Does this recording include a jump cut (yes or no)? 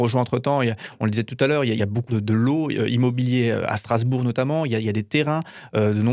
yes